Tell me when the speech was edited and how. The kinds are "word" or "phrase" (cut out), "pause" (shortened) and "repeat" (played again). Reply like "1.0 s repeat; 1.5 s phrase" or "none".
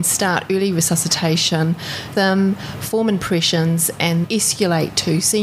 2.1 s word; 4.2 s word